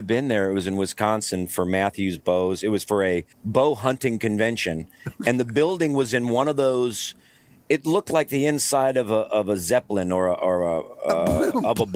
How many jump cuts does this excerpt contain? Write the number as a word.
one